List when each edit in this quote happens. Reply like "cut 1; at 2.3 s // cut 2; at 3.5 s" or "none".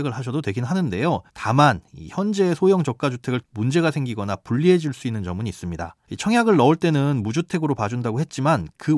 cut 1; at 1.3 s // cut 2; at 3.4 s // cut 3; at 6.0 s